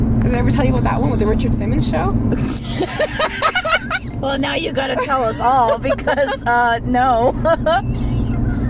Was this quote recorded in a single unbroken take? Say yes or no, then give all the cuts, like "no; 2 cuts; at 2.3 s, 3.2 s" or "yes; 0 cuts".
yes; 0 cuts